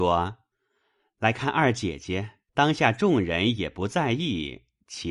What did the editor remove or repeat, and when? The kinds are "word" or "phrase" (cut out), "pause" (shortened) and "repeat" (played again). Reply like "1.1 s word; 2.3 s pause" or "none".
2.5 s pause